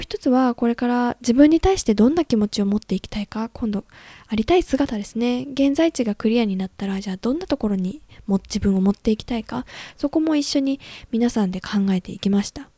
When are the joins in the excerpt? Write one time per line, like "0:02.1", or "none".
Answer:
none